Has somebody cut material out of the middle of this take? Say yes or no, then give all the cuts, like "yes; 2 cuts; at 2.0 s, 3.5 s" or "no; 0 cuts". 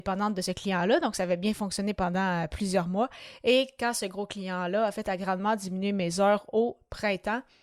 no; 0 cuts